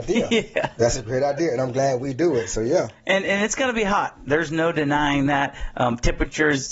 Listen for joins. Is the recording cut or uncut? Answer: uncut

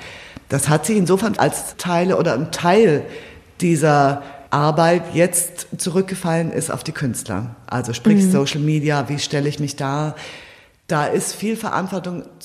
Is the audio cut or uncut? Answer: cut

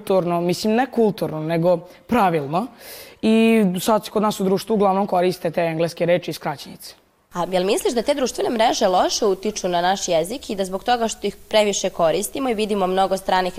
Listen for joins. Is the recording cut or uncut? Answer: uncut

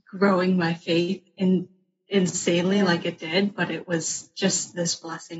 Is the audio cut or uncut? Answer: uncut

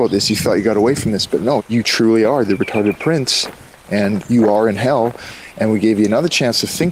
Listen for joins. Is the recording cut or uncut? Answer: cut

